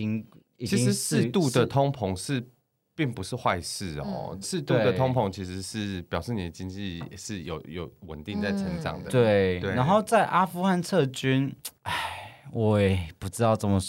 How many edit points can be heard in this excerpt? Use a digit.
2